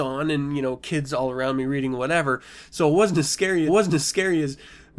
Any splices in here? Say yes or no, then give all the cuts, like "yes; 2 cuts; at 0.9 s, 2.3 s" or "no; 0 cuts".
yes; 1 cut; at 3.7 s